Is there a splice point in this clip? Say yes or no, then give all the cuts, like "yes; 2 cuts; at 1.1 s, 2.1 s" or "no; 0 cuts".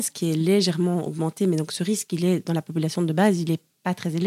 no; 0 cuts